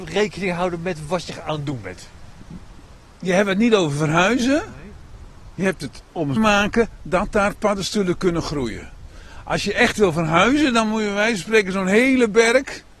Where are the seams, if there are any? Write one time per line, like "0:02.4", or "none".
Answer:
0:06.4